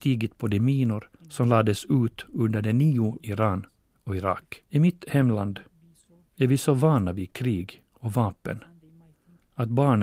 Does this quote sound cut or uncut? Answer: cut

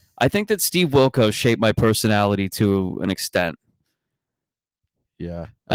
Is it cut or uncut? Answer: uncut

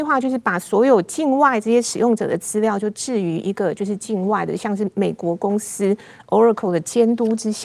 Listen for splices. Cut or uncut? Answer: uncut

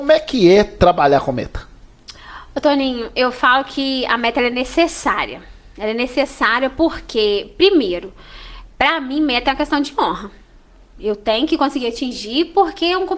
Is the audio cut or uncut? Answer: uncut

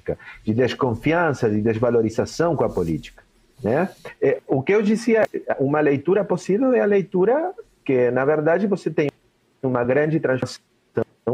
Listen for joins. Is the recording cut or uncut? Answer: uncut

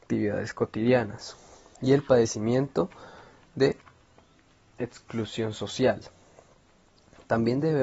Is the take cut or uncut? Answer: uncut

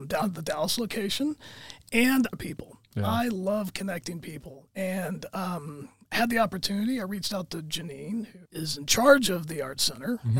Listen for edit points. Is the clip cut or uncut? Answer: cut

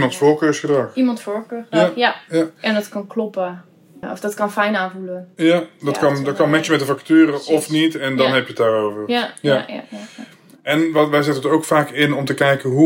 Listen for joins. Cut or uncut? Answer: uncut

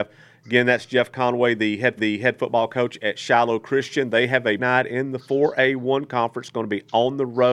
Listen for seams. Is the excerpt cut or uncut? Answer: cut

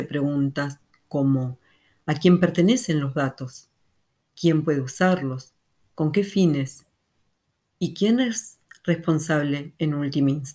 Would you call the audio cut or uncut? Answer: uncut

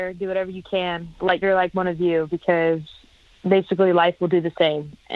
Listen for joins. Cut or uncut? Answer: cut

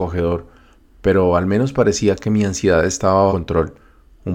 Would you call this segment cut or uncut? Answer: cut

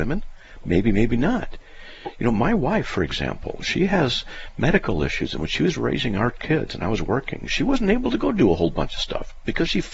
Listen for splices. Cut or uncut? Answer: uncut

